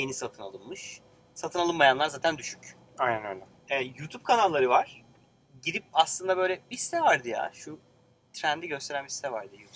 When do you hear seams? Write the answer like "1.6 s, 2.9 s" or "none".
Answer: none